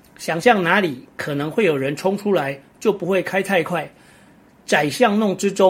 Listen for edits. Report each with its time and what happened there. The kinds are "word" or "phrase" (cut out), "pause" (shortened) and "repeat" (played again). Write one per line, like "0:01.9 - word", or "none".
none